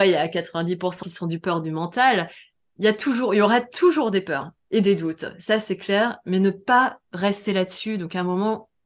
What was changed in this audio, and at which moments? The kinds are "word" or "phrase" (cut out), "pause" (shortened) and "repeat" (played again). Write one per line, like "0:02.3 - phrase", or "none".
0:01.0 - phrase